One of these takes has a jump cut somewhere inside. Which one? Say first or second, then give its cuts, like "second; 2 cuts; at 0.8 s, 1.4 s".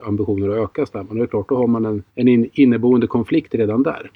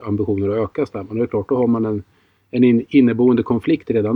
first; 1 cut; at 2.1 s